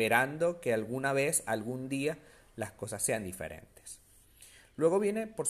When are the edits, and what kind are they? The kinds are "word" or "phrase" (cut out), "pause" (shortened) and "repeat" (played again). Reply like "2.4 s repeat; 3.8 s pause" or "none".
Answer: none